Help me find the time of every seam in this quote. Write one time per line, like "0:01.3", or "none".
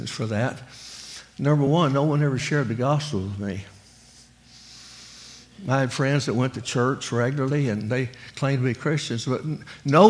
none